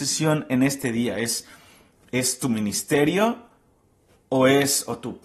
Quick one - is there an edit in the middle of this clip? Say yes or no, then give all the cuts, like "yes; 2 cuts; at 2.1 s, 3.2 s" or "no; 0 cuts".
no; 0 cuts